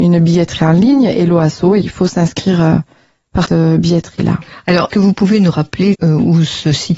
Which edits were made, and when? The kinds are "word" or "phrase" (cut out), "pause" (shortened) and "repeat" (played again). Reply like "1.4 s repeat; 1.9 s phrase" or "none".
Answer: 1.8 s word; 3.5 s word; 4.9 s word; 5.9 s word